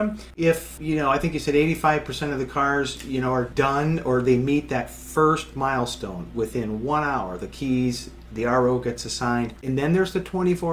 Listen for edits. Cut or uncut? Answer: uncut